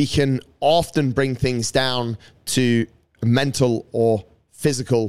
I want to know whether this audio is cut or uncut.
uncut